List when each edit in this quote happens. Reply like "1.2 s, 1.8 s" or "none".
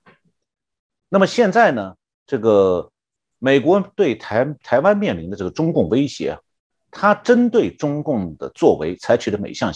none